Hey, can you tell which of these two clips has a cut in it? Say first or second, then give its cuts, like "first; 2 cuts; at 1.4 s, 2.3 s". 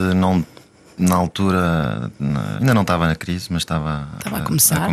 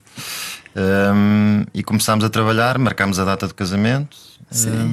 first; 1 cut; at 2.6 s